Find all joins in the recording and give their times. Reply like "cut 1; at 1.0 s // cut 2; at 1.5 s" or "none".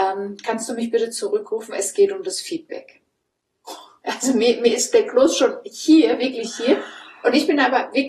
none